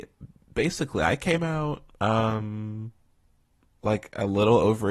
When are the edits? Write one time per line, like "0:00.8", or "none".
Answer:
none